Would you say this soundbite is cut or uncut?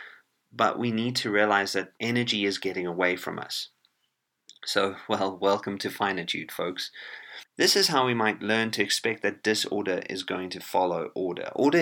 cut